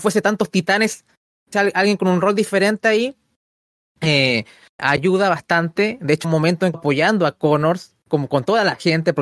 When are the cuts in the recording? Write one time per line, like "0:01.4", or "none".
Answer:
0:01.5
0:04.8
0:06.2
0:06.7